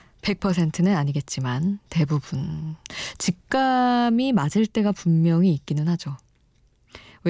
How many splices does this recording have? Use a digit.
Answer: 0